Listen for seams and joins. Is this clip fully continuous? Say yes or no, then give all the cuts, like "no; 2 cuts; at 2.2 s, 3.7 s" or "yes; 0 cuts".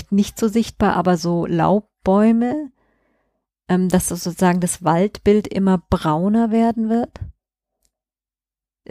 yes; 0 cuts